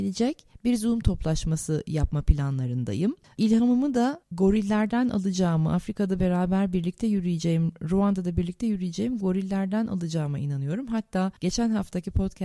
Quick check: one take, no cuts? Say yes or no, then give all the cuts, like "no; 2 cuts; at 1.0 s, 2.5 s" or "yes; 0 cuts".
no; 1 cut; at 4.2 s